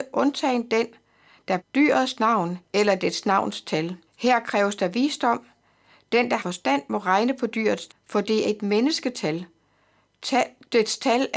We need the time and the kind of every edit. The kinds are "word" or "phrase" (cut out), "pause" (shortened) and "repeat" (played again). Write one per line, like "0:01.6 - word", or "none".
0:01.6 - phrase
0:02.7 - pause
0:04.1 - pause
0:06.4 - word
0:07.9 - word
0:08.4 - word